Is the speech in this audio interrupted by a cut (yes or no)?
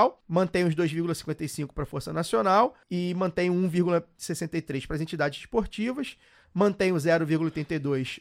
no